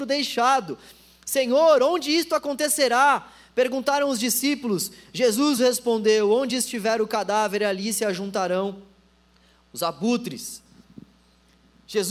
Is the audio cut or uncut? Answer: uncut